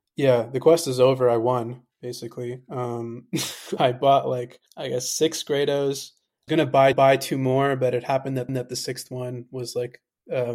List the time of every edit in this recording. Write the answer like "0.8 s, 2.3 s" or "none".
3.8 s, 4.7 s, 6.5 s, 6.9 s, 8.5 s